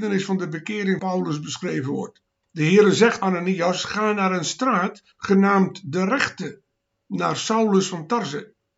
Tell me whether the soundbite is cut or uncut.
cut